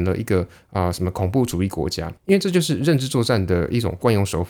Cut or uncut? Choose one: cut